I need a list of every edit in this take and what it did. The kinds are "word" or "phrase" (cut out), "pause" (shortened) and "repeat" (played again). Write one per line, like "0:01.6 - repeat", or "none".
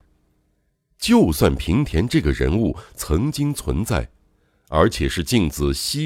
none